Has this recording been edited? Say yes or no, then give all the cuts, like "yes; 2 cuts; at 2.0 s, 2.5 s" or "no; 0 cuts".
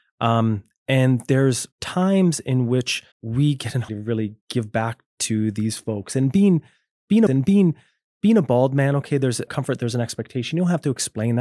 yes; 6 cuts; at 1.7 s, 3.1 s, 3.9 s, 4.4 s, 7.3 s, 9.5 s